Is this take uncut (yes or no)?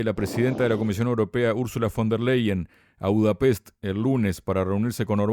yes